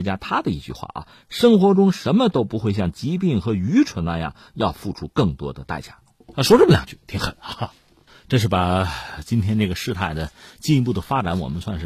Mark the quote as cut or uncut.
uncut